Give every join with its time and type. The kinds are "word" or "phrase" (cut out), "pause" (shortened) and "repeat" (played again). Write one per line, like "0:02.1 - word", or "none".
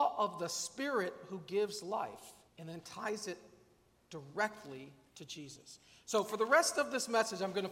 0:02.5 - pause